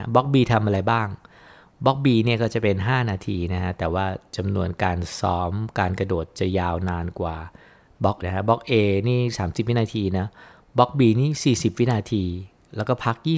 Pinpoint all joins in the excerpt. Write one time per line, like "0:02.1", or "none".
0:08.2